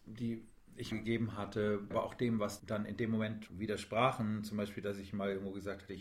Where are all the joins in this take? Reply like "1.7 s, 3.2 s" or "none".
0.9 s, 1.9 s, 2.6 s, 3.5 s

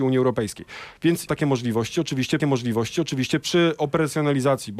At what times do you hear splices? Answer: 1.3 s, 2.4 s

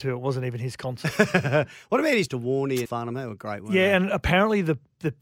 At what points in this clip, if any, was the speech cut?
2.3 s, 2.8 s

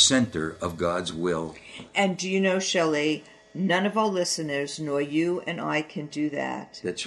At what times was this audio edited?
none

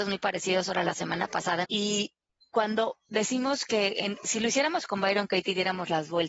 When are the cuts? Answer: 1.6 s

